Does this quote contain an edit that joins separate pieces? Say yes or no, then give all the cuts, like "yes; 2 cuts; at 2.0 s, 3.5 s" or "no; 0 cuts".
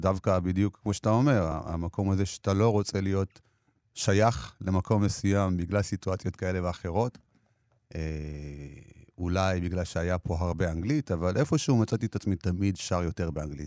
no; 0 cuts